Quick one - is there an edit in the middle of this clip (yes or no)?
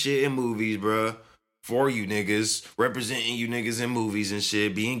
no